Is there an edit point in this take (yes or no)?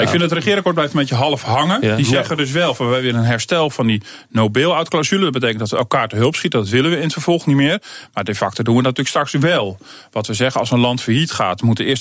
no